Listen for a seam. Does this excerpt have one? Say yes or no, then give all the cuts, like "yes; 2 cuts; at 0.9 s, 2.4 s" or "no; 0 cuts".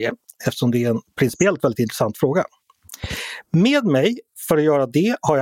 no; 0 cuts